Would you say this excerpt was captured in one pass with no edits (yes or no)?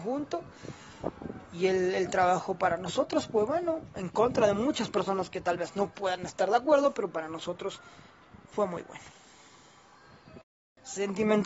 yes